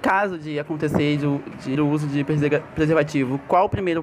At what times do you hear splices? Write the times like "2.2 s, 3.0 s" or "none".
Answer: 1.8 s